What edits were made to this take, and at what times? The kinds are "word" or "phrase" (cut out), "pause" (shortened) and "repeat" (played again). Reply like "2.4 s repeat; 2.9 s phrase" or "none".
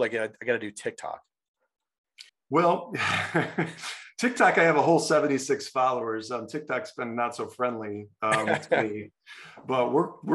2.3 s pause